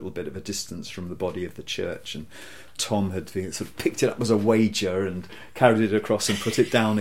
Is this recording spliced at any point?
no; 0 cuts

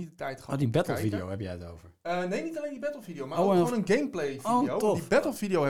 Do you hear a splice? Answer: no; 0 cuts

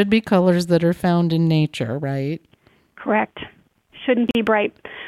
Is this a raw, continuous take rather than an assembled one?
yes; 0 cuts

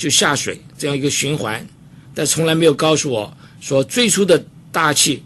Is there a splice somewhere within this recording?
no; 0 cuts

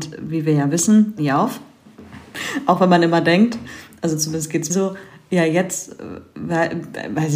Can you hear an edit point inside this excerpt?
yes; 2 cuts; at 1.2 s, 4.7 s

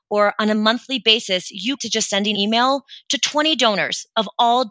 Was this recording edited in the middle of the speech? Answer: yes; 2 cuts; at 1.8 s, 2.3 s

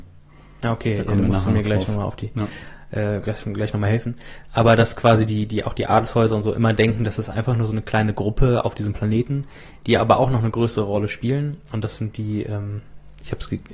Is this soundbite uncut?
yes; 0 cuts

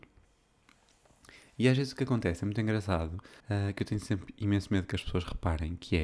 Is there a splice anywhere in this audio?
yes; 1 cut; at 3.4 s

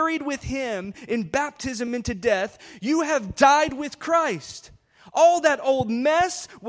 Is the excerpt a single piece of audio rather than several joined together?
yes; 0 cuts

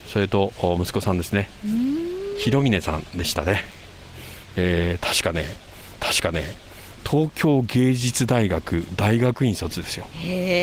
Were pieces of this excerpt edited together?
yes; 1 cut; at 6.0 s

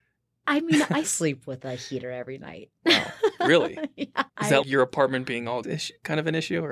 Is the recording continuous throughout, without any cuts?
no; 4 cuts; at 1.0 s, 4.3 s, 4.6 s, 5.6 s

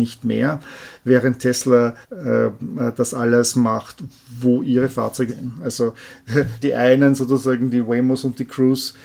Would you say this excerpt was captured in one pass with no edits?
no; 3 cuts; at 2.0 s, 5.3 s, 6.6 s

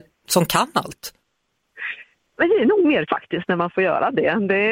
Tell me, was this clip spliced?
yes; 1 cut; at 3.1 s

